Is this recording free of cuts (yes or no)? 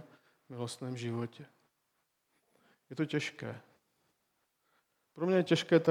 yes